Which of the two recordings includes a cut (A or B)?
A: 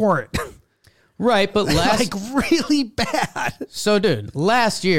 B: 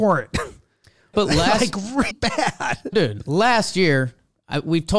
B